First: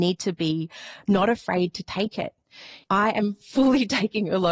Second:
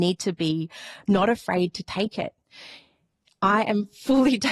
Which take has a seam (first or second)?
first